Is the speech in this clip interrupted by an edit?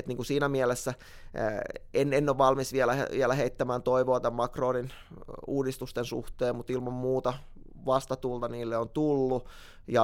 no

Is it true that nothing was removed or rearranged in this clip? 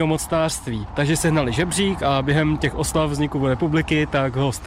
yes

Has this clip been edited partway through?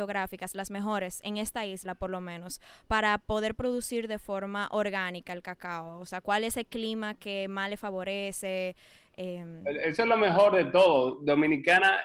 no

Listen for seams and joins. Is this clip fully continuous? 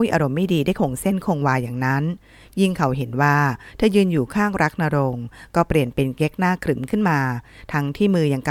yes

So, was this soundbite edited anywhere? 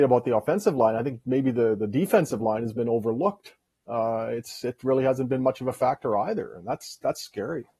no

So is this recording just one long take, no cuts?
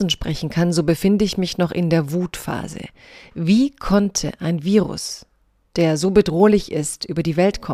yes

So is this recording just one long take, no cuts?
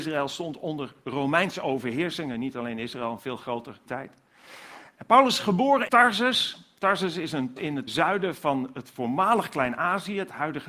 no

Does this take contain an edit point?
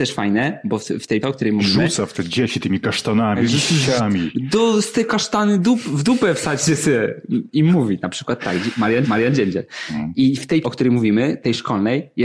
yes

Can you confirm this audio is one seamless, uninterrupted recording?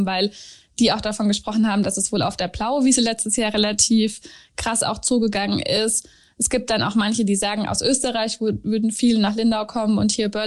yes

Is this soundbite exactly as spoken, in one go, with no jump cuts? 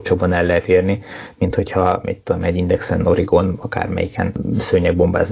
yes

